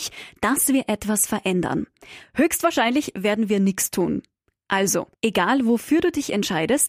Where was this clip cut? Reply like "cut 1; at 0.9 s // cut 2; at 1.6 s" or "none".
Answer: none